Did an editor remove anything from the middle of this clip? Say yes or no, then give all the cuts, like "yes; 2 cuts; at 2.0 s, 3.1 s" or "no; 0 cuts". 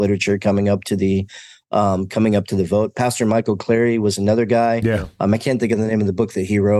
no; 0 cuts